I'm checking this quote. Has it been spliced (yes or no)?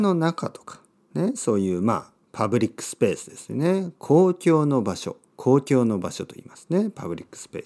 yes